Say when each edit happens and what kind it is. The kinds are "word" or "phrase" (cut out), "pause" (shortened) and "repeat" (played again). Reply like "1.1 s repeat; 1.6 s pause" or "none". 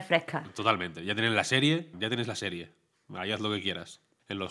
1.9 s word